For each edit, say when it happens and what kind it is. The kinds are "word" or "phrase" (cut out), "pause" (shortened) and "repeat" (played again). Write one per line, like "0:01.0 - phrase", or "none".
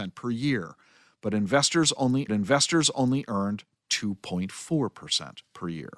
0:02.3 - repeat